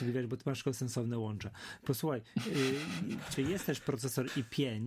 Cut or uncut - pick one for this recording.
cut